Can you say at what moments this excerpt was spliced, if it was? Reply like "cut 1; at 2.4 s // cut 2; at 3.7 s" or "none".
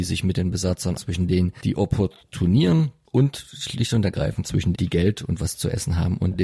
cut 1; at 1.0 s // cut 2; at 4.7 s